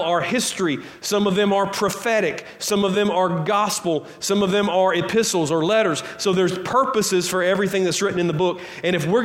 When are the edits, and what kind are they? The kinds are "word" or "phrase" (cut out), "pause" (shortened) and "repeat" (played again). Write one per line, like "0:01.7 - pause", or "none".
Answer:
none